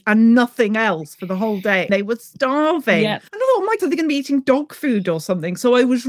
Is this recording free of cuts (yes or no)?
no